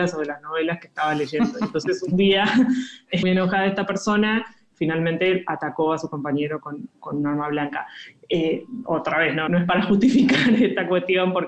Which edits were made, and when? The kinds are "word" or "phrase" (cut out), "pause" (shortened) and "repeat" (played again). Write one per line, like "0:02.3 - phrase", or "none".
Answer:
0:03.2 - word
0:04.7 - word
0:09.5 - word